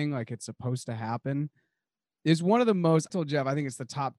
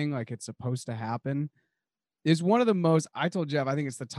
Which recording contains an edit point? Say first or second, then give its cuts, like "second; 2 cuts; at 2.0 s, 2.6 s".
first; 1 cut; at 3.1 s